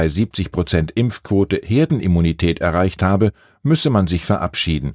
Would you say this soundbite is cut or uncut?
uncut